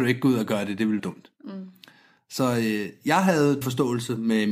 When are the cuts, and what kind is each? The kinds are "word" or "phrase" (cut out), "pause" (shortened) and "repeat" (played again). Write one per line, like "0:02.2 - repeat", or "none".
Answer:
0:01.0 - word
0:03.6 - word